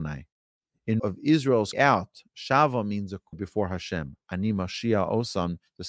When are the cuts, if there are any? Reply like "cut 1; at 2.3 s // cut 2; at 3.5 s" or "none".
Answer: cut 1; at 1.0 s // cut 2; at 1.7 s // cut 3; at 3.3 s